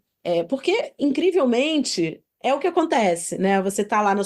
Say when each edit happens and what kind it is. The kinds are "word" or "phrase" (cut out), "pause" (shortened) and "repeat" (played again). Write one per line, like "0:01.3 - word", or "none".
0:02.3 - pause